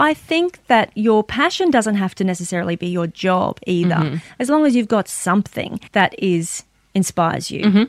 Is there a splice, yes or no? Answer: yes